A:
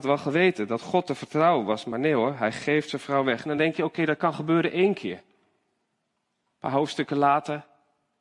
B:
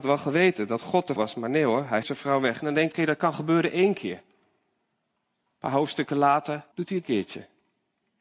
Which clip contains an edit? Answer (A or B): B